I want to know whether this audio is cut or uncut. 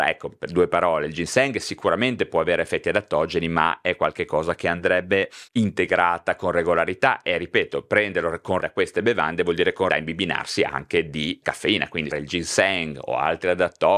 cut